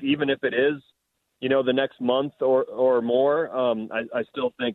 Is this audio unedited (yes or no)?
yes